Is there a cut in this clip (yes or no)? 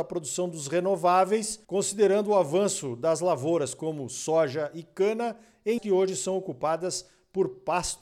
yes